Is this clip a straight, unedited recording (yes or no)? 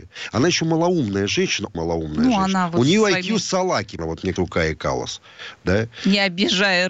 no